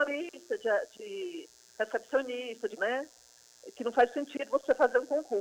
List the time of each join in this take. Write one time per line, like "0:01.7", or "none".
0:02.8